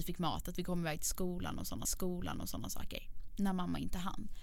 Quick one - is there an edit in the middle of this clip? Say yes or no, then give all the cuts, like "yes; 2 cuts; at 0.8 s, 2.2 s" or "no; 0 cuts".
yes; 1 cut; at 1.8 s